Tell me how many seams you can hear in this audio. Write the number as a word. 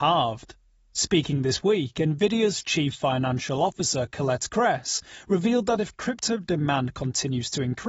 zero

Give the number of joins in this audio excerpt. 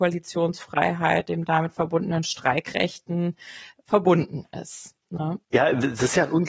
two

